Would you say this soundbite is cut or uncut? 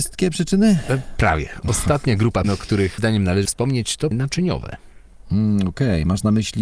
cut